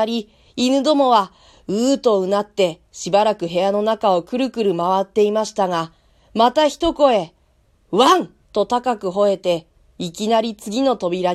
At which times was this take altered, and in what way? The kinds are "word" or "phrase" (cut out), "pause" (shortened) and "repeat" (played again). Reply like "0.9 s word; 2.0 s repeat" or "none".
8.4 s pause